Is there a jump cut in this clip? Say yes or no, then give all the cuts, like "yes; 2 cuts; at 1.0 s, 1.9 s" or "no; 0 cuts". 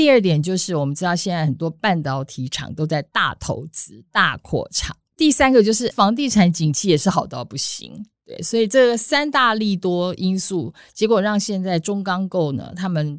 yes; 1 cut; at 5.9 s